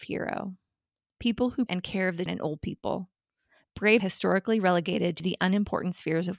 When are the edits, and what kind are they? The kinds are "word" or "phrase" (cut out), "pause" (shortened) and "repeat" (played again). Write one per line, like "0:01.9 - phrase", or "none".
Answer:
0:01.7 - phrase
0:02.3 - word
0:04.0 - word